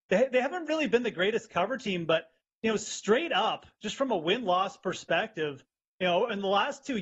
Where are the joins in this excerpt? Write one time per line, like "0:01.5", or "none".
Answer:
none